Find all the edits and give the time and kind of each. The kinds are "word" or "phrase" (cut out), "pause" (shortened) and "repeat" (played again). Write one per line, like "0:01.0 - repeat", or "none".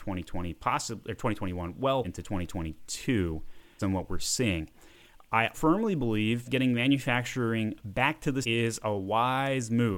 0:02.0 - word
0:03.8 - word
0:05.5 - word
0:06.4 - word
0:08.4 - word